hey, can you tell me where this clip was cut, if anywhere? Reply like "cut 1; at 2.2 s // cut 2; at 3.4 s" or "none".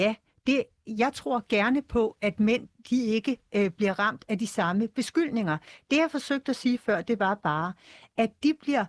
none